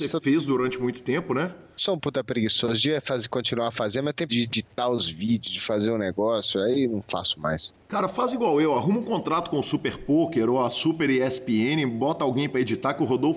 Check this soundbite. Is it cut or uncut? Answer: cut